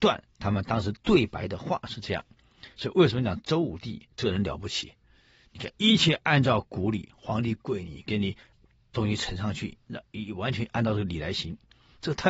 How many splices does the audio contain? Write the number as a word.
one